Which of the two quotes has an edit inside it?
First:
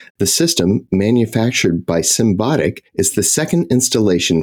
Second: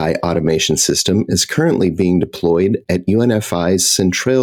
first; 1 cut; at 2.9 s

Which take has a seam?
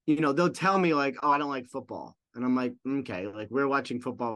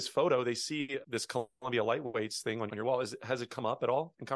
second; 2 cuts; at 1.0 s, 2.7 s

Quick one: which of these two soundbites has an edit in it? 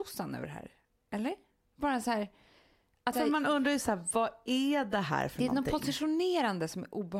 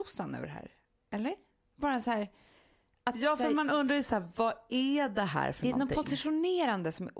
first; 1 cut; at 3.1 s

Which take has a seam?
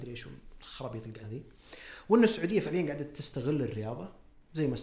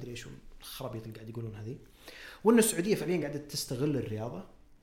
first; 1 cut; at 1.2 s

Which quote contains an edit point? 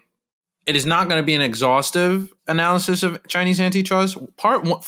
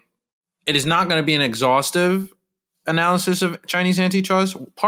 first; 1 cut; at 2.4 s

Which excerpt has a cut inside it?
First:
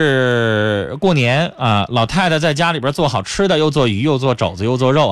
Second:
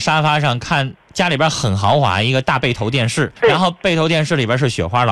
second; 1 cut; at 3.4 s

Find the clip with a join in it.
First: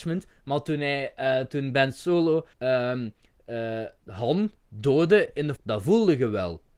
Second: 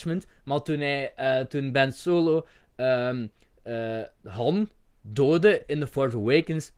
first; 3 cuts; at 2.5 s, 4.6 s, 5.6 s

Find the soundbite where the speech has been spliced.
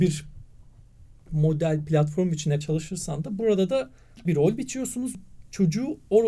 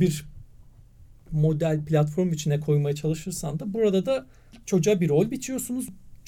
first; 2 cuts; at 2.6 s, 4.3 s

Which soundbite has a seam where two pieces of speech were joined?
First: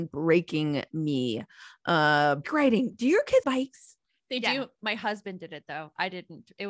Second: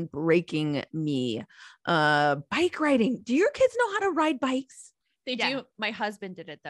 first; 2 cuts; at 2.4 s, 3.4 s

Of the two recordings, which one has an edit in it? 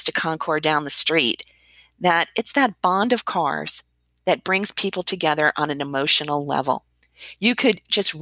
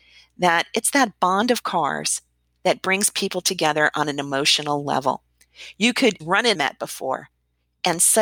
second; 2 cuts; at 6.2 s, 6.5 s

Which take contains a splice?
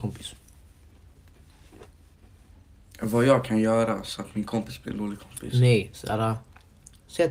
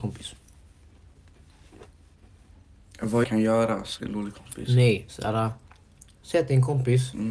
second; 2 cuts; at 3.2 s, 4.0 s

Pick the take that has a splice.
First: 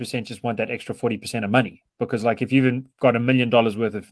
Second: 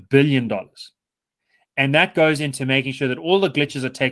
second; 1 cut; at 1.4 s

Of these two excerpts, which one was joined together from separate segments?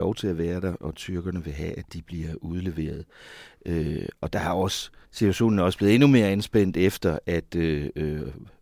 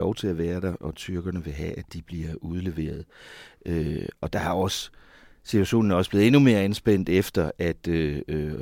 first; 1 cut; at 5.0 s

